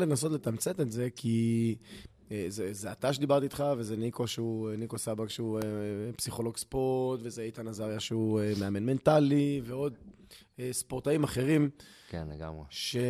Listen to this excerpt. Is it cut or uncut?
uncut